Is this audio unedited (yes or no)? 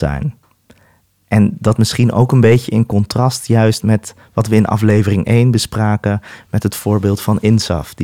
no